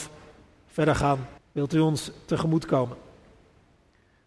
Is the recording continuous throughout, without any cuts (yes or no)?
no